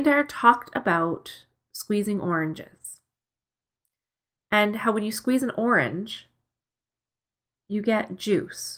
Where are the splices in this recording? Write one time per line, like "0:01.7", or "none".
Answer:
none